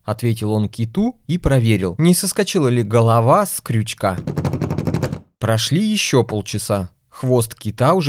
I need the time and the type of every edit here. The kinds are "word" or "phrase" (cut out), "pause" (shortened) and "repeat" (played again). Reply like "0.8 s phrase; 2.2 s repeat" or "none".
none